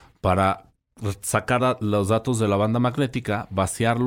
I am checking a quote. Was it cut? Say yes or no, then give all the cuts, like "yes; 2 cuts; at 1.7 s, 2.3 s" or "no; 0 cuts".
yes; 1 cut; at 1.6 s